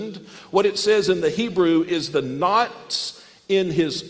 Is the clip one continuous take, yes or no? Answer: no